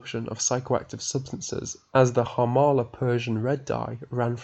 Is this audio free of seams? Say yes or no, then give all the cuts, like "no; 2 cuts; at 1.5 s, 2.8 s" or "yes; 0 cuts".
yes; 0 cuts